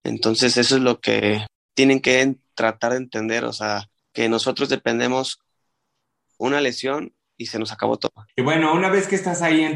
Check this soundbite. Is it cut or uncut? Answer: uncut